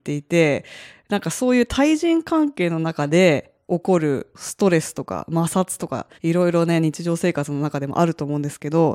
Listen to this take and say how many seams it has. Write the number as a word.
one